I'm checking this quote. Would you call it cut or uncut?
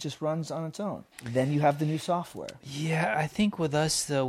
cut